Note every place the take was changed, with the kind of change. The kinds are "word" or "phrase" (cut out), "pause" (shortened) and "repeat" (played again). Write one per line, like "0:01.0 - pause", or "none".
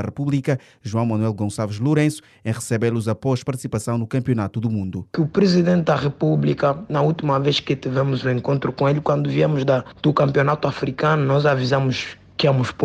none